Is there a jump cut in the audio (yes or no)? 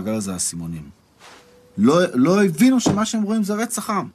no